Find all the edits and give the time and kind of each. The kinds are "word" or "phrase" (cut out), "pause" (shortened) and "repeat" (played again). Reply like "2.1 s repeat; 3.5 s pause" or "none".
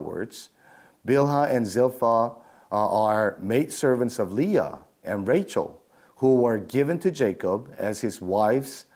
none